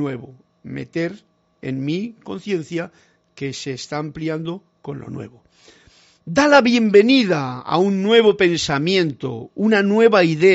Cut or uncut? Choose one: uncut